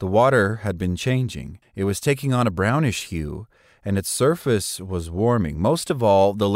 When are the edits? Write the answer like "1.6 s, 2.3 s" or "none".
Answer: 1.6 s